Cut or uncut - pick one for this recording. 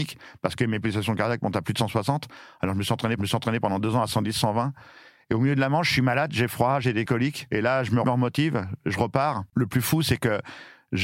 cut